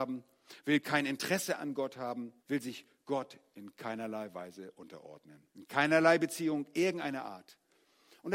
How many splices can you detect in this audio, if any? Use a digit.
2